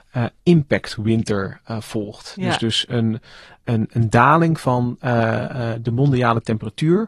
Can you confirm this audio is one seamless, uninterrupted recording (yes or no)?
yes